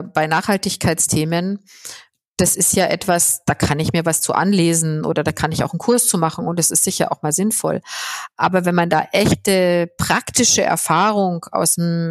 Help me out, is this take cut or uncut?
uncut